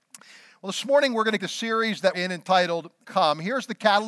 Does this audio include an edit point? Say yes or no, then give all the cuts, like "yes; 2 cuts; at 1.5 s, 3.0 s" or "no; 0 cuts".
yes; 3 cuts; at 1.4 s, 2.1 s, 3.0 s